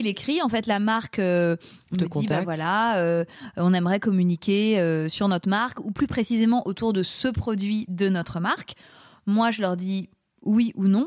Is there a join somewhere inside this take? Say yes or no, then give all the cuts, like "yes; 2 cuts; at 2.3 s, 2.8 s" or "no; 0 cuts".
no; 0 cuts